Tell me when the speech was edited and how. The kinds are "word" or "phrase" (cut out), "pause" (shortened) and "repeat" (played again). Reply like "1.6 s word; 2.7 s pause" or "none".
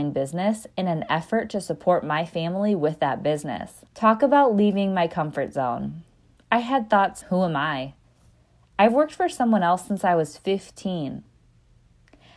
3.9 s pause; 7.2 s word